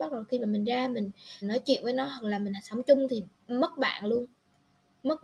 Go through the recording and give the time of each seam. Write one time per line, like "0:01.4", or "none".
0:01.4

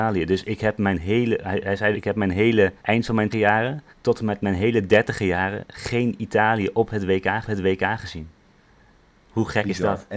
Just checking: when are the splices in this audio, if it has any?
0:01.9
0:02.8
0:03.3
0:03.9
0:07.4

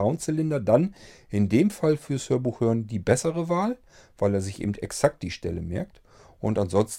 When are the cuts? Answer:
none

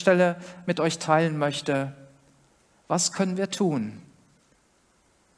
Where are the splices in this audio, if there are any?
none

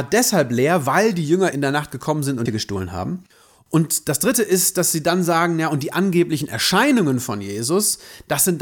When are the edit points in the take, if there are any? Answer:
0:01.5
0:02.5

